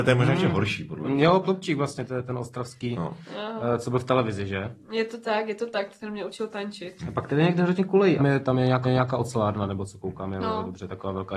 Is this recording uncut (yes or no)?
no